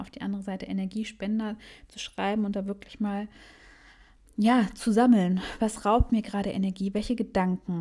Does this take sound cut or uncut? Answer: uncut